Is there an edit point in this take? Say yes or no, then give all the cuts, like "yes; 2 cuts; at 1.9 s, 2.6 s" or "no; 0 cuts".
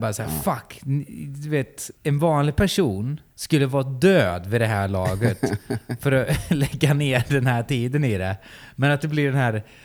yes; 2 cuts; at 2.0 s, 3.3 s